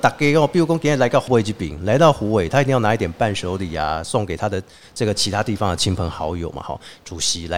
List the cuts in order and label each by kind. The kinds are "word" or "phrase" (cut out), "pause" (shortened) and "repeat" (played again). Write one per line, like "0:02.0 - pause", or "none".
0:01.3 - word